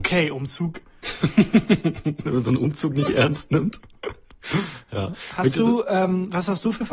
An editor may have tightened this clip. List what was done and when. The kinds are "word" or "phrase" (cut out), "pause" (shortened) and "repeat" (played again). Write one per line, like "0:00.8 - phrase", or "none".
none